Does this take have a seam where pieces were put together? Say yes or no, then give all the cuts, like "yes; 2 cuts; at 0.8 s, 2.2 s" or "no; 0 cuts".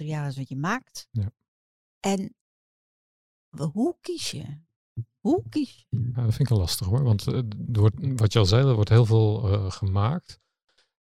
no; 0 cuts